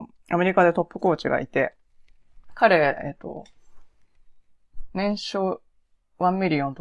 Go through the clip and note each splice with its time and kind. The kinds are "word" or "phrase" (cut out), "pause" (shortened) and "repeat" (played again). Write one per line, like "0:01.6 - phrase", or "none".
none